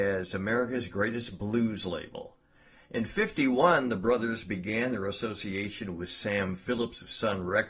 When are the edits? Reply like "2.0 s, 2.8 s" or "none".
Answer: none